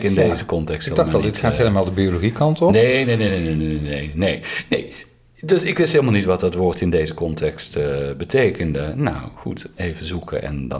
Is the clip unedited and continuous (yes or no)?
yes